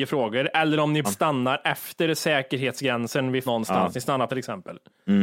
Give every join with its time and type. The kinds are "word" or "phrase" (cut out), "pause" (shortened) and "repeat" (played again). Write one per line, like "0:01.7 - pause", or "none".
0:01.0 - word
0:03.5 - word
0:04.3 - word